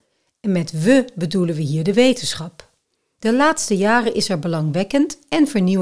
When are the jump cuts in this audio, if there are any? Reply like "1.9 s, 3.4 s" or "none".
none